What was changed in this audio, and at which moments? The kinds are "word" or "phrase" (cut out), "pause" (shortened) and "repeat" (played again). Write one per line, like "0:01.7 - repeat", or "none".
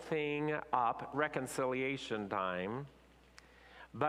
0:01.1 - phrase